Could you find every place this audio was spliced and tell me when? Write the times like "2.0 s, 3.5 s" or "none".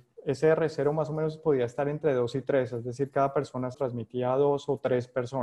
3.7 s